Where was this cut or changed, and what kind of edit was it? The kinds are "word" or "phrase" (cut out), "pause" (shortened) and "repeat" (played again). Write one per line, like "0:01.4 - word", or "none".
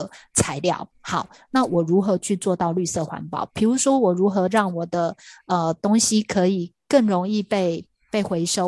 0:00.9 - pause